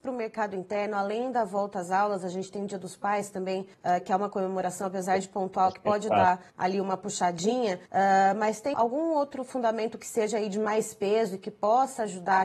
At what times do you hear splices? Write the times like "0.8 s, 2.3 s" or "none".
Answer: 3.7 s, 6.5 s, 7.9 s, 8.7 s

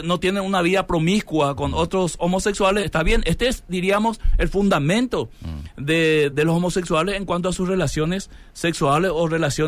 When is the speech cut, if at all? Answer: 2.8 s, 6.3 s

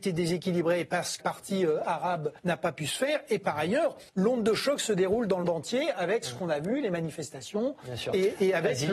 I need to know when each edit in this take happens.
1.2 s, 2.4 s, 4.1 s, 5.4 s

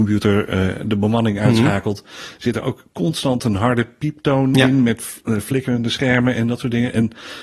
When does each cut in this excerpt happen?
none

